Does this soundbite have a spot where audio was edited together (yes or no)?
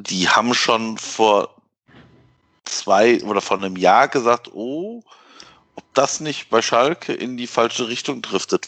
no